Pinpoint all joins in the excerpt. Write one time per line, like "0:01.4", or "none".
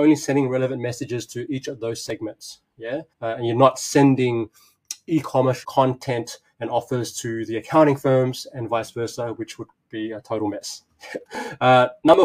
0:03.1
0:05.6

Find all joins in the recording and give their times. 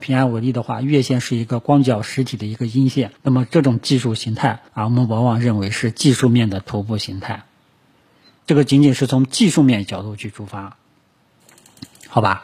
0:03.2
0:04.7
0:08.4

